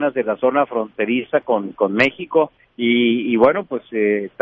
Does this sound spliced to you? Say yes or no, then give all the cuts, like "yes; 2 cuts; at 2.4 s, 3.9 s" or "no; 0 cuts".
yes; 1 cut; at 2.6 s